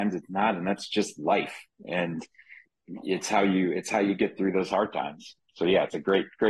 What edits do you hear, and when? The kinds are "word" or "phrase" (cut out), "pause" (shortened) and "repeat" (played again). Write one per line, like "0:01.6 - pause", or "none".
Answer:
none